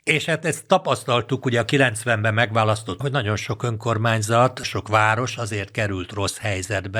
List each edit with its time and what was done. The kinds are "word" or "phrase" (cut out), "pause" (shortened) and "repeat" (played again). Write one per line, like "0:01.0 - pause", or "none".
0:03.0 - word
0:04.6 - word